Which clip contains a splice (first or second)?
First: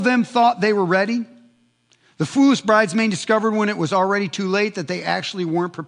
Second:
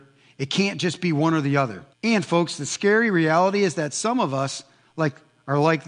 second